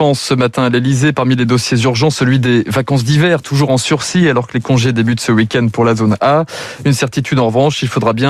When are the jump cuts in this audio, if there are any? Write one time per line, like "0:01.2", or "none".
none